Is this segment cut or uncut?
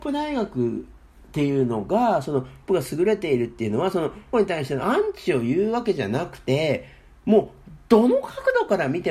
cut